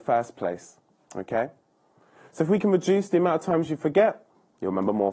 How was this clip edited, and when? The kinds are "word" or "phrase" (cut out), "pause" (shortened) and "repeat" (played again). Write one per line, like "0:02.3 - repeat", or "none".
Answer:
none